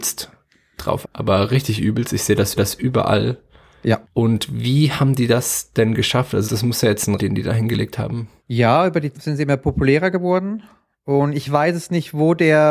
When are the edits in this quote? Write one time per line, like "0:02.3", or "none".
0:01.0
0:02.6
0:04.0
0:06.5
0:07.2
0:08.4
0:09.1